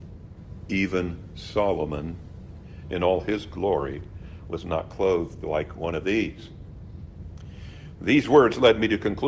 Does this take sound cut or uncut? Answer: uncut